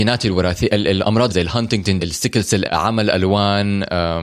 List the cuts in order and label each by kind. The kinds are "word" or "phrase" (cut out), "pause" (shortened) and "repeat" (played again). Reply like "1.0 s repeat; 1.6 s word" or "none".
1.3 s word; 2.0 s word; 2.6 s word

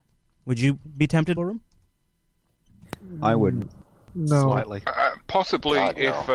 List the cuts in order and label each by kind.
1.4 s word

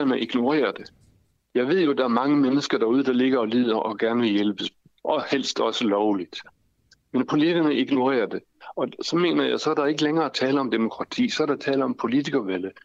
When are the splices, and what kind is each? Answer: none

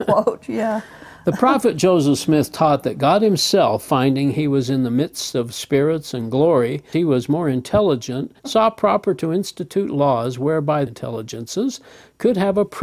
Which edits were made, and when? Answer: 6.9 s word; 8.4 s pause; 10.9 s phrase

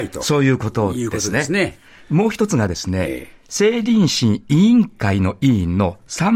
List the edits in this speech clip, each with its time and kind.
none

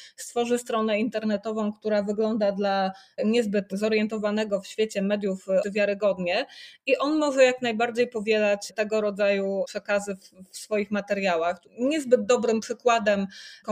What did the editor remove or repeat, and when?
5.6 s word; 11.7 s pause

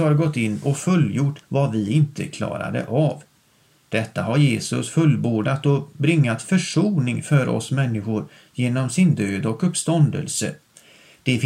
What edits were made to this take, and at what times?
1.4 s pause

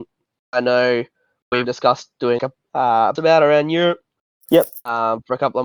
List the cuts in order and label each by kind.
1.6 s word; 2.4 s word; 3.2 s word

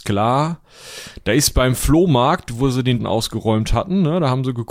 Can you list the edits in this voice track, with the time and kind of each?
3.0 s word

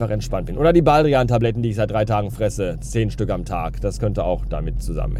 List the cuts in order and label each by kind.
none

